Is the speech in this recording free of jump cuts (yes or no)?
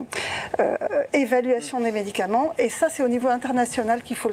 yes